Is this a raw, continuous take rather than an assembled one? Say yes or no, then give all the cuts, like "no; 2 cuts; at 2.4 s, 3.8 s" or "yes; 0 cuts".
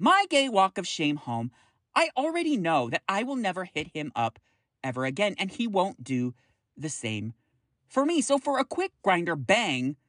yes; 0 cuts